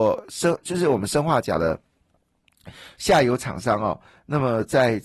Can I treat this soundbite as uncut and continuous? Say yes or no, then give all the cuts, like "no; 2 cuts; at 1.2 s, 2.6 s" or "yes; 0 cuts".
yes; 0 cuts